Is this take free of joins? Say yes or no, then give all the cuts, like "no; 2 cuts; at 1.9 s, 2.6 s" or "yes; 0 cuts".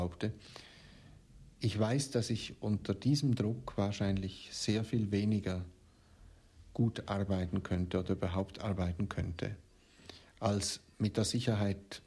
yes; 0 cuts